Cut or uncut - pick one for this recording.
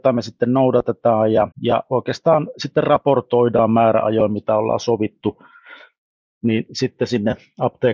cut